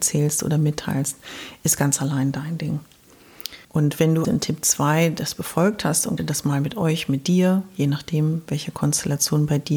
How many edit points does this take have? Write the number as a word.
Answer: three